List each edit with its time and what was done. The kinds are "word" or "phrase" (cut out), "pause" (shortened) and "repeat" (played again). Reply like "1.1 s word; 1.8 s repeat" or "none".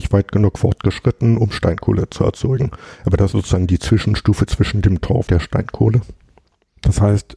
3.3 s word; 5.3 s word